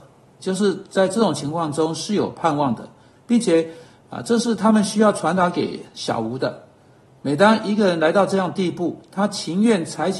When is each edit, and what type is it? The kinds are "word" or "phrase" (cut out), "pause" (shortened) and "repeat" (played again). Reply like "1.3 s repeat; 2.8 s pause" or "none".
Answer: none